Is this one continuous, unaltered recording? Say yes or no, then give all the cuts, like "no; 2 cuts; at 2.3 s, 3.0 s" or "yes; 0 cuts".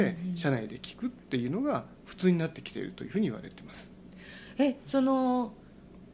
yes; 0 cuts